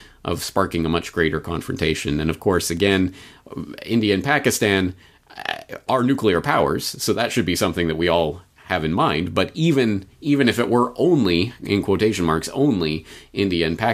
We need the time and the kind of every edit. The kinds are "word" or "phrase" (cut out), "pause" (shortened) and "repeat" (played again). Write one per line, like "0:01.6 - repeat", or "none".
none